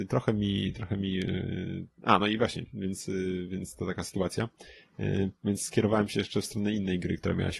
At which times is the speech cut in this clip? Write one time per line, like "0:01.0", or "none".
none